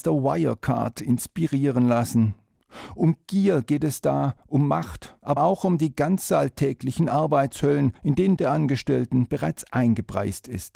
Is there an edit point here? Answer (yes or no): yes